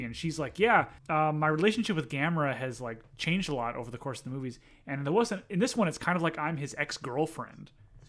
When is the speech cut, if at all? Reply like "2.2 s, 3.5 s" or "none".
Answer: 1.0 s

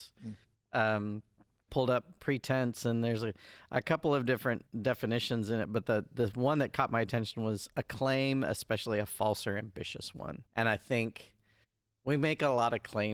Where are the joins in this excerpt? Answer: 1.7 s, 4.7 s, 10.5 s

